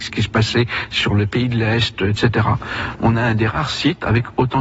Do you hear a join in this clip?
no; 0 cuts

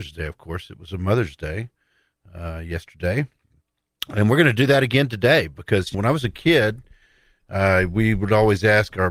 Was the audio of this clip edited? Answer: yes; 1 cut; at 5.9 s

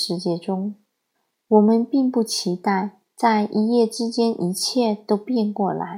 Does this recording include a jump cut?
yes; 1 cut; at 1.1 s

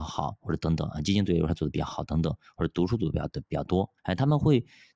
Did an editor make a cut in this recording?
yes; 1 cut; at 4.0 s

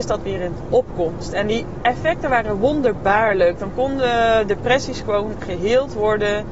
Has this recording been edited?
no; 0 cuts

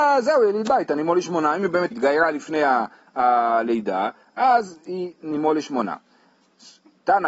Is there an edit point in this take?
yes; 1 cut; at 1.9 s

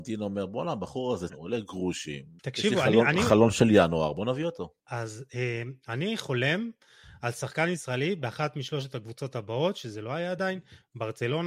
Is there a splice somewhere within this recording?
yes; 3 cuts; at 1.3 s, 2.4 s, 4.8 s

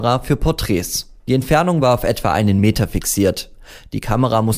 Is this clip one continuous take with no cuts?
yes; 0 cuts

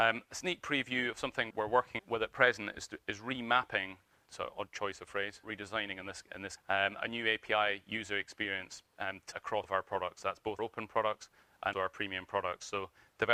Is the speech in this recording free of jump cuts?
no; 9 cuts; at 1.5 s, 2.0 s, 4.3 s, 5.4 s, 6.6 s, 9.3 s, 9.6 s, 10.6 s, 11.7 s

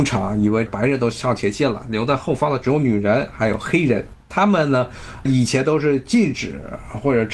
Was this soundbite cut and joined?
yes; 1 cut; at 4.2 s

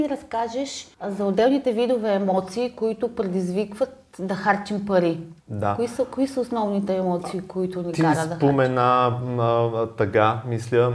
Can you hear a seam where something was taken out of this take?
yes; 2 cuts; at 0.9 s, 5.4 s

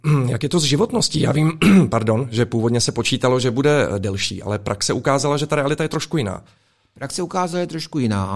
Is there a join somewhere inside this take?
no; 0 cuts

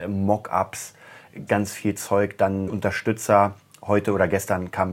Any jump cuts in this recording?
yes; 2 cuts; at 1.5 s, 2.7 s

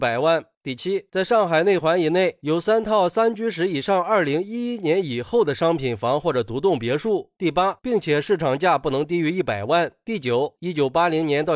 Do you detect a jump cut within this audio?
yes; 1 cut; at 7.8 s

